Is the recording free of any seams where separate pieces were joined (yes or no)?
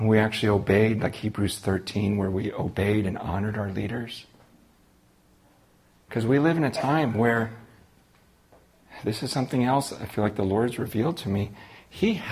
yes